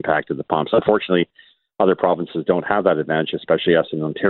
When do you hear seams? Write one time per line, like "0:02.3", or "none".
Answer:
none